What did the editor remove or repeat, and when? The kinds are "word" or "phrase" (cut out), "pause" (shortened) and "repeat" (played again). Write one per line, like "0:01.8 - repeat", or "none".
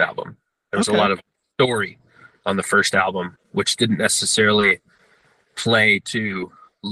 none